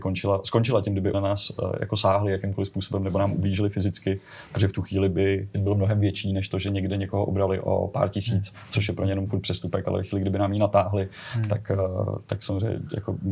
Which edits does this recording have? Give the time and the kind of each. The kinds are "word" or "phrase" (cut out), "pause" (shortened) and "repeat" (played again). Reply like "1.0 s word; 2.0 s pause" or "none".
1.1 s word; 5.5 s phrase